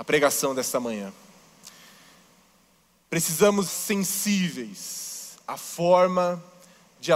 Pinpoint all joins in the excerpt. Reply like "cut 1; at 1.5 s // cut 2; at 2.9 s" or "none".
cut 1; at 3.7 s